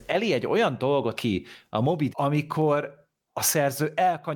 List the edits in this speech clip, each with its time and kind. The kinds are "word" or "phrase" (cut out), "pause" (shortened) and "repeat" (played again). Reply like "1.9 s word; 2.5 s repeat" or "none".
1.2 s word; 2.1 s word